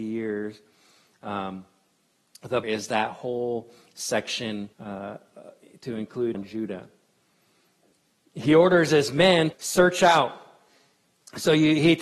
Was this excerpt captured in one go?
no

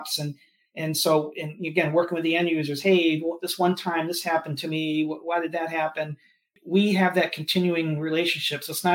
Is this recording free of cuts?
yes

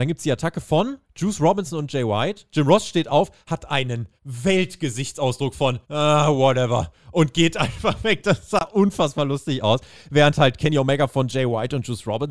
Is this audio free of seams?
no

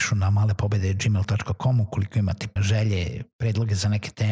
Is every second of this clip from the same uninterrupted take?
no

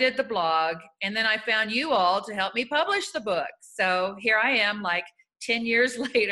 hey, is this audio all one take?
yes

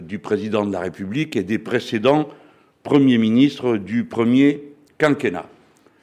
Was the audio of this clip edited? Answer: no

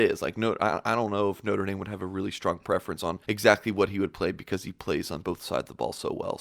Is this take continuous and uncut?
no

